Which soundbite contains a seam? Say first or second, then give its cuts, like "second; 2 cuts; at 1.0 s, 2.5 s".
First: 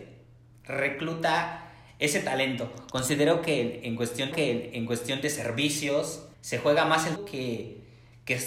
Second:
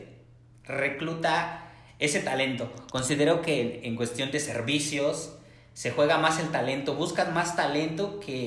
first; 3 cuts; at 4.3 s, 6.3 s, 7.2 s